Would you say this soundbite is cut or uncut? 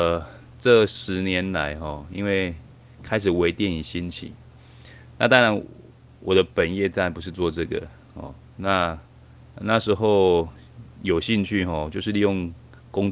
uncut